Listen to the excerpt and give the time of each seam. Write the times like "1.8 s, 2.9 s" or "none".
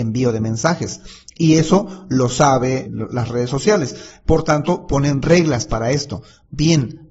2.9 s